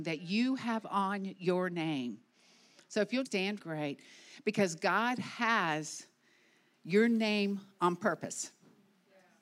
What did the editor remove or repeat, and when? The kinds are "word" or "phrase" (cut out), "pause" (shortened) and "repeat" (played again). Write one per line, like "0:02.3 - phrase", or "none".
0:03.3 - word
0:03.6 - phrase